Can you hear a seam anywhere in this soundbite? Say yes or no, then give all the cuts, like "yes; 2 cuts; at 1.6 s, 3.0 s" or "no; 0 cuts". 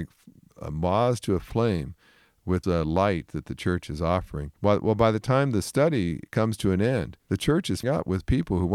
yes; 4 cuts; at 2.6 s, 4.6 s, 7.2 s, 7.8 s